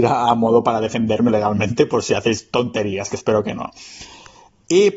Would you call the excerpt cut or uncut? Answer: cut